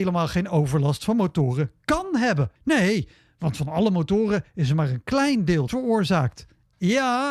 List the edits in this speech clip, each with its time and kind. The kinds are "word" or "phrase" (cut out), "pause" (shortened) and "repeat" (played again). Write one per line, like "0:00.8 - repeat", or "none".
0:02.6 - pause
0:05.7 - phrase